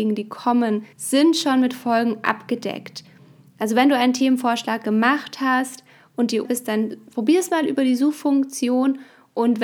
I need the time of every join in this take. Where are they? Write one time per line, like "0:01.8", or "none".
0:00.9
0:06.4